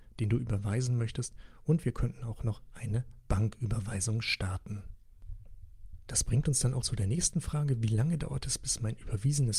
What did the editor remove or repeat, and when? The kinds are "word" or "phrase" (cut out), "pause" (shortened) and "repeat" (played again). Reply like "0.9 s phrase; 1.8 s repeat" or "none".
6.8 s word